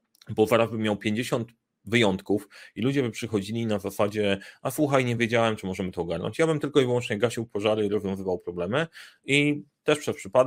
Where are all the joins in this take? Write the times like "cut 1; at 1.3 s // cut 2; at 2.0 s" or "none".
none

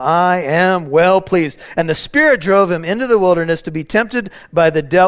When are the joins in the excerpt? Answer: none

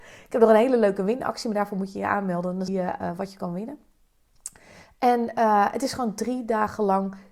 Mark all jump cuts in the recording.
cut 1; at 2.7 s

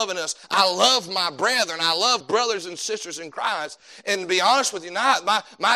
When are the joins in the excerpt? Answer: cut 1; at 2.2 s

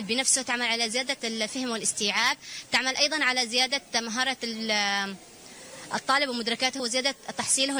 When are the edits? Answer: cut 1; at 6.8 s

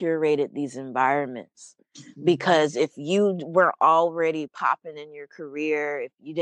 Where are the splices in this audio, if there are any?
none

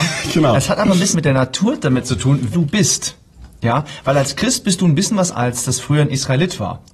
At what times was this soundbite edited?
cut 1; at 1.1 s // cut 2; at 2.5 s // cut 3; at 5.3 s

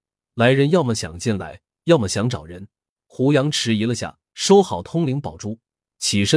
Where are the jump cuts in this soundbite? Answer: cut 1; at 3.0 s // cut 2; at 4.3 s

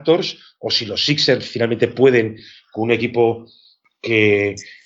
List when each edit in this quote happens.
none

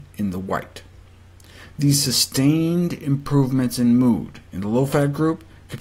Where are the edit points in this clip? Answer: none

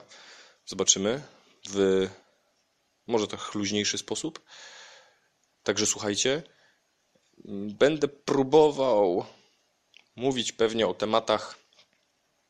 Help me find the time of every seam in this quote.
none

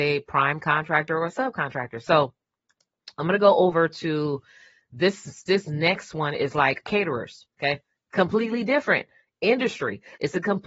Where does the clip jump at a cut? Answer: cut 1; at 6.8 s

